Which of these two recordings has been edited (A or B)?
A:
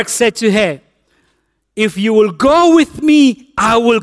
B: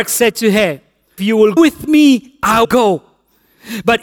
B